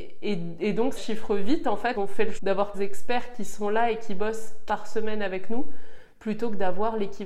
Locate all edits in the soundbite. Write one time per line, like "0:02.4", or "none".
0:01.0
0:01.9
0:02.4
0:02.7
0:04.7